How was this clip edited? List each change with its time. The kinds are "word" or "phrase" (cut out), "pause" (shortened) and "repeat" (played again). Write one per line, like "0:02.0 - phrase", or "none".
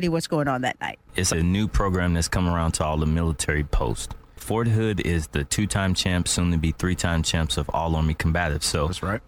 0:01.3 - word